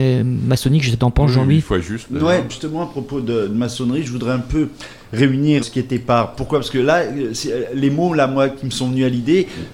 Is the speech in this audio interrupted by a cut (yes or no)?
yes